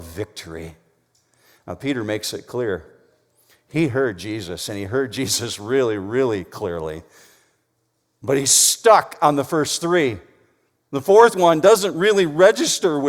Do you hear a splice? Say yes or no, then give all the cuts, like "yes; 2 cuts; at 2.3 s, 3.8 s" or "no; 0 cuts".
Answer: no; 0 cuts